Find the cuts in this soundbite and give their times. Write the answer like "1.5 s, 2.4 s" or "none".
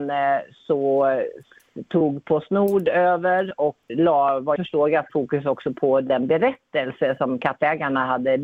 3.9 s, 4.6 s, 5.1 s